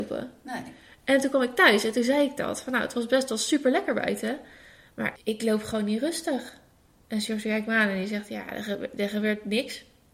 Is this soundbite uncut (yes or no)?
no